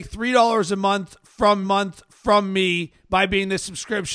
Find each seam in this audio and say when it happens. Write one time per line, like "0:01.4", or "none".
0:01.6